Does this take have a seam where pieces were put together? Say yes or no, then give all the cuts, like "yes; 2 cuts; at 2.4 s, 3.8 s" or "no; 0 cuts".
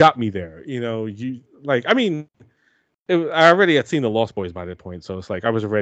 no; 0 cuts